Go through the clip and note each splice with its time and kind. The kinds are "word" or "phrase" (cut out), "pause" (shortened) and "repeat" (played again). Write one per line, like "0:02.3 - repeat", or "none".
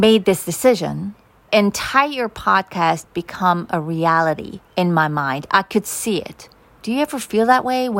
0:01.5 - word
0:03.0 - word
0:04.7 - pause